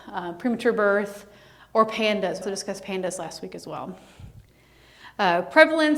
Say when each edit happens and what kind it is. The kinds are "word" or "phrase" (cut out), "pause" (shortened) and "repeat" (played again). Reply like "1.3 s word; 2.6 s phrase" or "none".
2.4 s word